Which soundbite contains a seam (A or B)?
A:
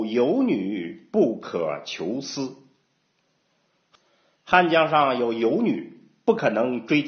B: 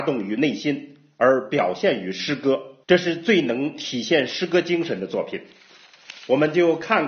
B